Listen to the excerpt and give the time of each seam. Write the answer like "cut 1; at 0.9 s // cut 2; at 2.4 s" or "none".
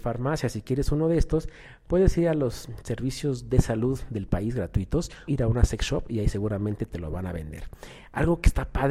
cut 1; at 5.3 s